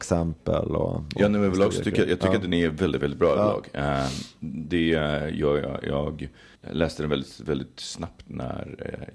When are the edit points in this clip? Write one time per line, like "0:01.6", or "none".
0:06.6

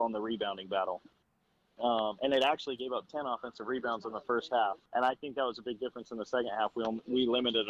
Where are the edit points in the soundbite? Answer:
0:04.9

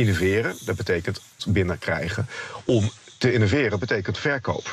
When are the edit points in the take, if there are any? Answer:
0:01.4

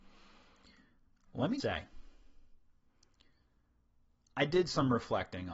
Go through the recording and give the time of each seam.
0:01.6

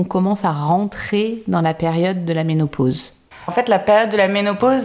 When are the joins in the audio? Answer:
0:03.5

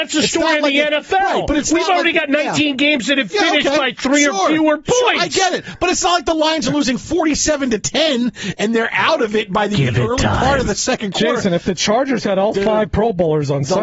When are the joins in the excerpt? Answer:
none

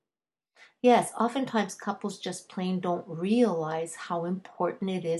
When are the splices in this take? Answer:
none

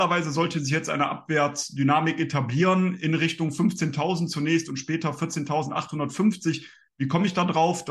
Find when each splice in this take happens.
none

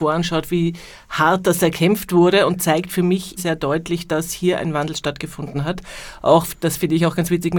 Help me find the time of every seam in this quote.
0:03.4

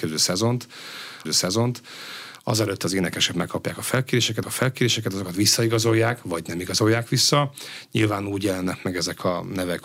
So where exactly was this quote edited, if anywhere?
0:01.3
0:04.4

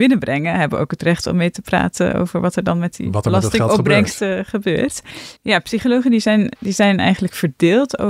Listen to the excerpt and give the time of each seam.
0:05.4

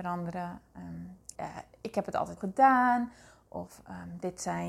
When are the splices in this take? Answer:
0:01.3
0:02.4

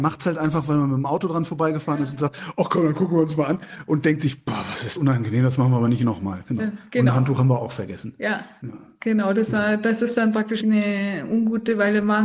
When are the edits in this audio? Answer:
0:05.0
0:10.6

